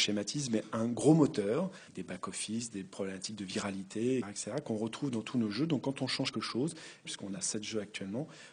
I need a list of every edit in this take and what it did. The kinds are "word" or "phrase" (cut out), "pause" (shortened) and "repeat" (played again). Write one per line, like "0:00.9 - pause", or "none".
0:01.9 - pause
0:04.2 - word
0:06.3 - word
0:07.0 - phrase